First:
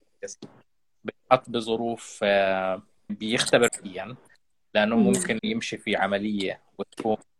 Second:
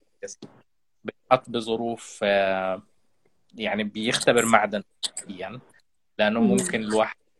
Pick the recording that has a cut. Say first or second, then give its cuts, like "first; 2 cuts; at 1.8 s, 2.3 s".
first; 3 cuts; at 3.1 s, 3.7 s, 5.4 s